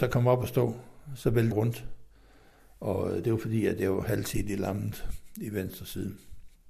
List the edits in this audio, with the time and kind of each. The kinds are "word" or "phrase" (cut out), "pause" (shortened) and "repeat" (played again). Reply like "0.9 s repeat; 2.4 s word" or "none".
1.5 s word